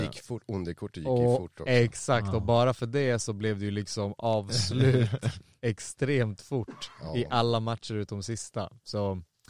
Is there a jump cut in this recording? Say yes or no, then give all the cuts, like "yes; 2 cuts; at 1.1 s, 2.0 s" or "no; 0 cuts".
no; 0 cuts